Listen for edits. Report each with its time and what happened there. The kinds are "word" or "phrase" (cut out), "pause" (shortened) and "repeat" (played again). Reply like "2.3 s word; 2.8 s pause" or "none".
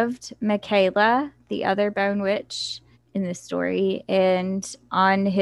2.9 s pause